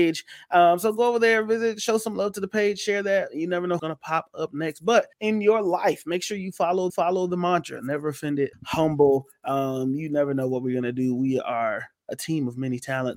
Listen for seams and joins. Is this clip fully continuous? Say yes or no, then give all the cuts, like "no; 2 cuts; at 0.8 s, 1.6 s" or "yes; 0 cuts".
no; 4 cuts; at 3.8 s, 5.1 s, 6.9 s, 8.5 s